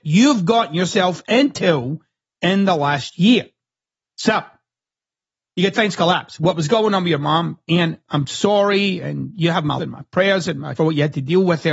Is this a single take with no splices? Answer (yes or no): no